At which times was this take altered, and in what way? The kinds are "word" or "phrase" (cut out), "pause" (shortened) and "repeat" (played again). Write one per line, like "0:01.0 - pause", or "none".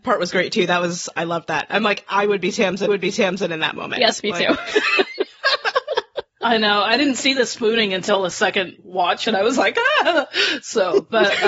0:02.9 - repeat